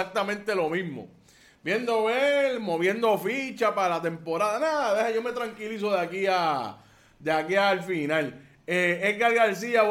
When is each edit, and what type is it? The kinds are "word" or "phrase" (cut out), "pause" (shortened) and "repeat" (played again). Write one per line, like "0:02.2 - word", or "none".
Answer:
none